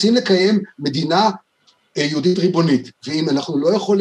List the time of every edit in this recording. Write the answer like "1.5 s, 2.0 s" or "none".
none